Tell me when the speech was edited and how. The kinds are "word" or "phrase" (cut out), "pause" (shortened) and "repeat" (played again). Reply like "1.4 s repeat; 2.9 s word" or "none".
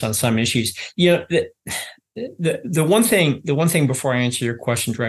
none